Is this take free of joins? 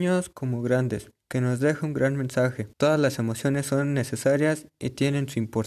no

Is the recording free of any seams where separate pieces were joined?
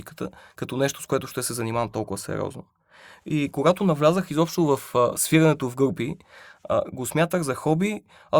yes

